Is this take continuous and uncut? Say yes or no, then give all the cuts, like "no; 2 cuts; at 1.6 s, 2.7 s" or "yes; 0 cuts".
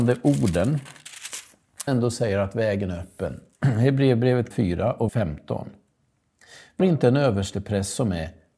no; 4 cuts; at 1.9 s, 4.5 s, 5.1 s, 6.8 s